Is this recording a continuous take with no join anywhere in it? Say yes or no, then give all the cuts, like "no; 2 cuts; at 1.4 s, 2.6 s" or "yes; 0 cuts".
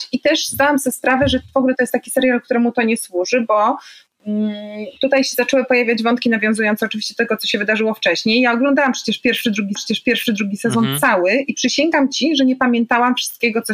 no; 1 cut; at 9.8 s